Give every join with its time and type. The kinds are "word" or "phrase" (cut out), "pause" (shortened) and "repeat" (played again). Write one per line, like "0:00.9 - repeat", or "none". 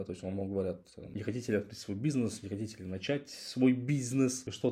none

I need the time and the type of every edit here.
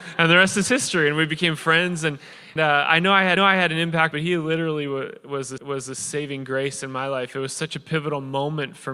0:02.6 - word
0:03.4 - repeat
0:04.1 - phrase
0:05.6 - repeat

